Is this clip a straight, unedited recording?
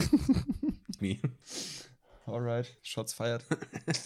no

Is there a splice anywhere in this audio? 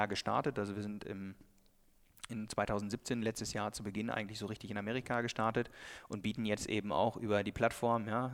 no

